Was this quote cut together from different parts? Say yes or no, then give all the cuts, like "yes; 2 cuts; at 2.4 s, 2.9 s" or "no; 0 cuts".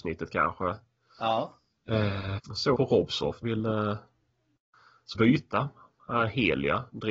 yes; 4 cuts; at 2.4 s, 2.7 s, 3.4 s, 5.1 s